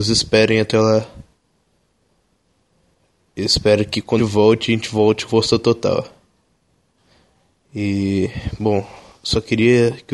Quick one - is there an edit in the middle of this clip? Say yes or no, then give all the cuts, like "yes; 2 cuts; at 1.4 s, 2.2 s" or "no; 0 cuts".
yes; 2 cuts; at 4.2 s, 5.3 s